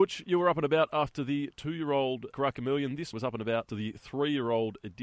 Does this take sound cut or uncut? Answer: cut